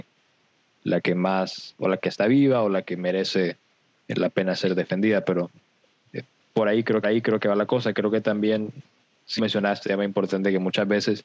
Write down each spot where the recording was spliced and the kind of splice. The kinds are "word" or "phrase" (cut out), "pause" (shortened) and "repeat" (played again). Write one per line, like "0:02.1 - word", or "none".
0:07.0 - repeat
0:09.4 - word
0:09.8 - word